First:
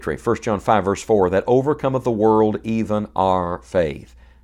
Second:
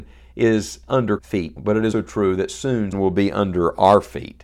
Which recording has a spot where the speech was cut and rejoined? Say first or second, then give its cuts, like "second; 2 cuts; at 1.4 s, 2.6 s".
second; 4 cuts; at 1.2 s, 1.6 s, 1.9 s, 2.9 s